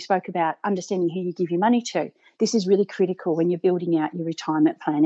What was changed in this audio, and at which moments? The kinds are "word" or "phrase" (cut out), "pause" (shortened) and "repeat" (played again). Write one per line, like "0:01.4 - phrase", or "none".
none